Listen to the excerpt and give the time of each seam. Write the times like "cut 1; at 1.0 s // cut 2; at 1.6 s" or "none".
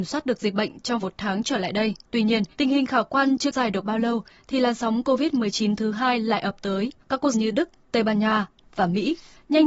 cut 1; at 1.0 s // cut 2; at 2.0 s // cut 3; at 2.5 s // cut 4; at 3.5 s // cut 5; at 7.0 s // cut 6; at 7.3 s // cut 7; at 8.6 s